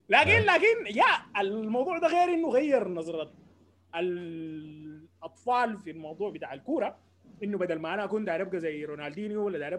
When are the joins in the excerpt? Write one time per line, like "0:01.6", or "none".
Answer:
none